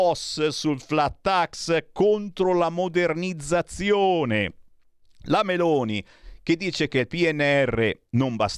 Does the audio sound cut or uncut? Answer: uncut